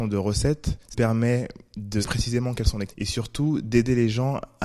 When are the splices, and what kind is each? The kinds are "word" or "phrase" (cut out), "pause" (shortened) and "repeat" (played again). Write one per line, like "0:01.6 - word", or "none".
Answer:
0:00.9 - word
0:02.0 - word
0:02.9 - word